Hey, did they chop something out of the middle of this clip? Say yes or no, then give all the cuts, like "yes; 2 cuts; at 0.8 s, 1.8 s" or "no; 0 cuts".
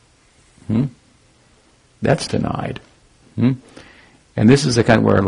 yes; 1 cut; at 2.3 s